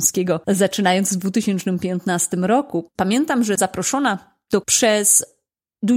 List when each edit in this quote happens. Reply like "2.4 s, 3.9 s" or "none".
3.6 s, 4.6 s